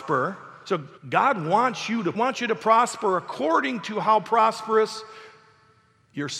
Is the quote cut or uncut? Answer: cut